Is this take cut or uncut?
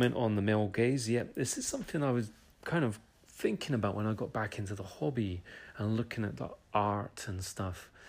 uncut